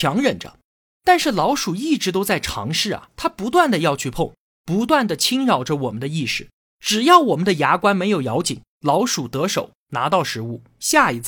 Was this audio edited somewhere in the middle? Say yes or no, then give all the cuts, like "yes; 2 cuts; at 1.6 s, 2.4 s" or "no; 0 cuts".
no; 0 cuts